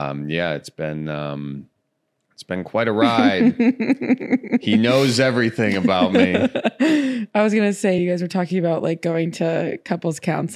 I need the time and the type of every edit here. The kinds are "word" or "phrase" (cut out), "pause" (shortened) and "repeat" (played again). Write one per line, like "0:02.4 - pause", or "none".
none